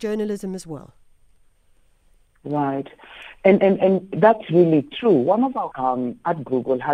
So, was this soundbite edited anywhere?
yes; 2 cuts; at 3.6 s, 5.7 s

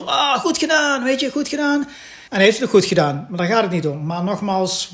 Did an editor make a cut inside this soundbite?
yes; 1 cut; at 2.3 s

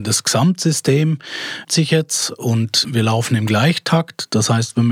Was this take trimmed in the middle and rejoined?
yes; 2 cuts; at 1.6 s, 2.8 s

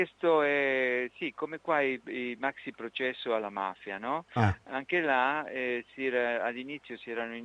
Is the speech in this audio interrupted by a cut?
no; 0 cuts

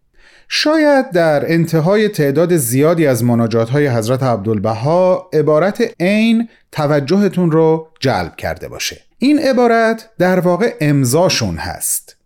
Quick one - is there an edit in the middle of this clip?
yes; 2 cuts; at 5.9 s, 9.1 s

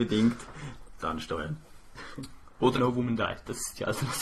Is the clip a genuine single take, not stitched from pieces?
no; 2 cuts; at 1.0 s, 2.8 s

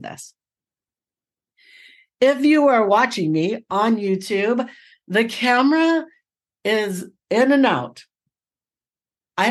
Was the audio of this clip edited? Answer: no; 0 cuts

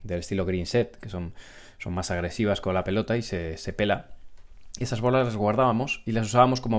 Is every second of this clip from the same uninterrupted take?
yes; 0 cuts

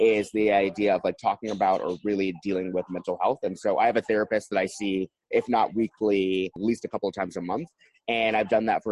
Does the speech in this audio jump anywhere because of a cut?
no; 0 cuts

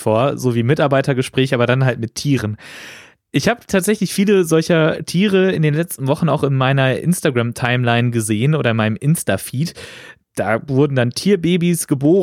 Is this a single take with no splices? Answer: yes; 0 cuts

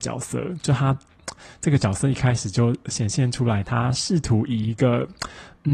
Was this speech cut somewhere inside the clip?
no; 0 cuts

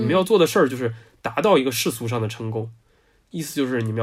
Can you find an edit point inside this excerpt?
no; 0 cuts

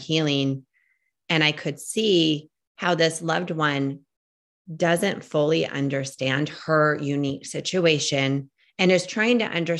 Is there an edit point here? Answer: no; 0 cuts

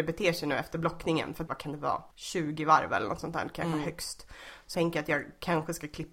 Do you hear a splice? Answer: yes; 3 cuts; at 1.5 s, 2.1 s, 4.7 s

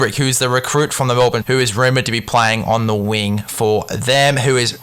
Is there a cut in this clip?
yes; 1 cut; at 1.4 s

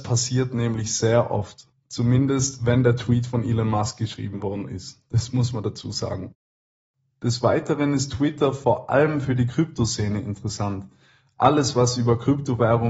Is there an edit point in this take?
no; 0 cuts

